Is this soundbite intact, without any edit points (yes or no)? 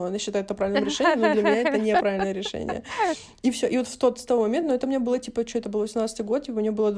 yes